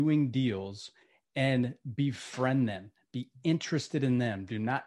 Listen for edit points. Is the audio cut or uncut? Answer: uncut